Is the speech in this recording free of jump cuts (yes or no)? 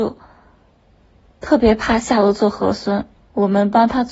no